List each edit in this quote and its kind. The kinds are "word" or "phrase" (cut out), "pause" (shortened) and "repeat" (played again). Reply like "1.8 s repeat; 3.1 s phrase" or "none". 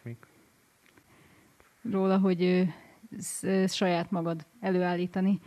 1.9 s word; 3.7 s word